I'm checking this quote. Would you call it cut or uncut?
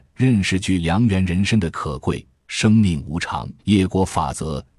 cut